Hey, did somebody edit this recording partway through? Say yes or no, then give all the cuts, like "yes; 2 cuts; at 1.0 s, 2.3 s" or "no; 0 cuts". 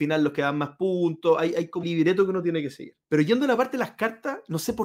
yes; 2 cuts; at 1.8 s, 3.0 s